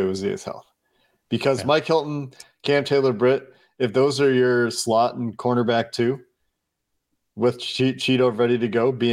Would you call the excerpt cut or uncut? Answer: uncut